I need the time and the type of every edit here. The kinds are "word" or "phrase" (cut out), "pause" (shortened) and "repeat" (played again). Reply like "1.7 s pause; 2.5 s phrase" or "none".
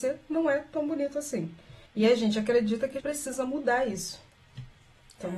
1.9 s pause; 3.0 s word

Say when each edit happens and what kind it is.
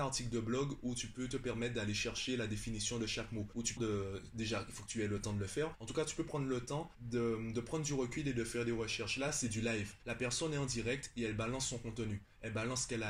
3.8 s phrase

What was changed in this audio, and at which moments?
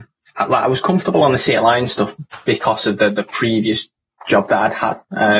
none

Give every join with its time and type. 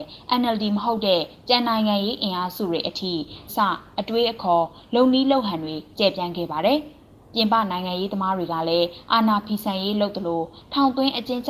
3.5 s word

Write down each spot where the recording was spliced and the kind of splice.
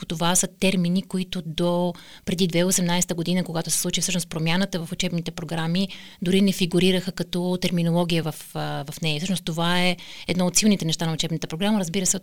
none

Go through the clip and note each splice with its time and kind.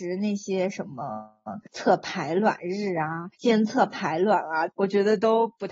1.6 s pause; 3.3 s pause; 4.7 s phrase

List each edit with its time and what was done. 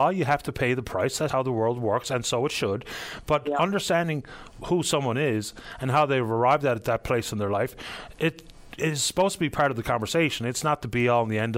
1.3 s word

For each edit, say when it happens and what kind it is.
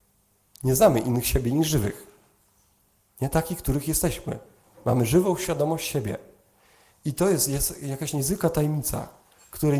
none

